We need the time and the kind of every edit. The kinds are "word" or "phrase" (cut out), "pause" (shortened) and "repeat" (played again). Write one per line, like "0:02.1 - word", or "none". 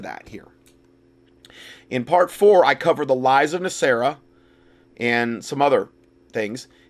none